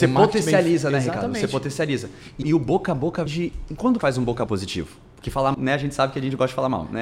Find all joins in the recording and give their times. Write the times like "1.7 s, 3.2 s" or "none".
2.4 s, 3.3 s, 4.0 s, 4.5 s, 5.5 s